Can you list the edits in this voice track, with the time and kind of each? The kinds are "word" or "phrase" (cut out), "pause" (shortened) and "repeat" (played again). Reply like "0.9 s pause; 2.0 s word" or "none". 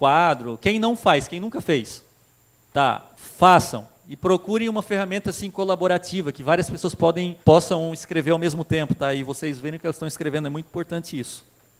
2.5 s pause; 7.4 s pause